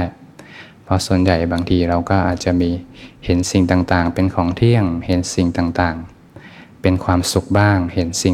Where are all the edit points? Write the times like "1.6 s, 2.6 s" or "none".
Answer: none